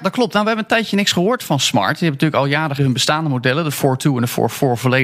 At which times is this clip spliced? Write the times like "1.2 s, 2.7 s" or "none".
2.8 s